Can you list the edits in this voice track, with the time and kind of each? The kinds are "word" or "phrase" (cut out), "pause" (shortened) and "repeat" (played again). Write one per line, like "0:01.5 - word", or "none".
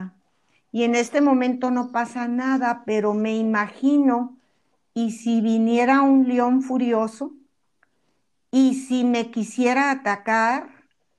none

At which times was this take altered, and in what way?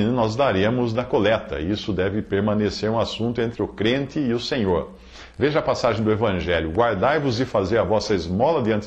none

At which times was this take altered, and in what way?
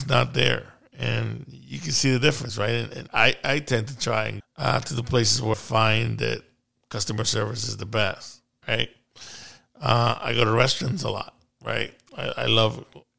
0:03.1 - word
0:04.4 - word
0:05.5 - word

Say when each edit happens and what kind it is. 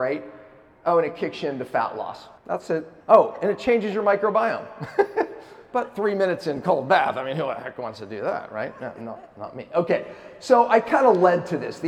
0:02.4 - pause
0:03.0 - pause

